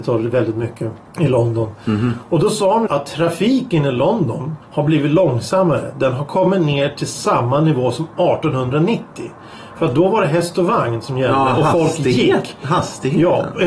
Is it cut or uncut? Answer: cut